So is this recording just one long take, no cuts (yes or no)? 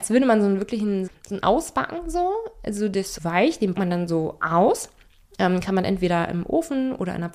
no